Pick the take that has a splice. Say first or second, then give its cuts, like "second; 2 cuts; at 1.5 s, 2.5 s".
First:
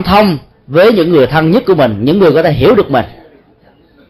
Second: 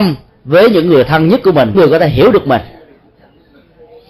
second; 1 cut; at 1.7 s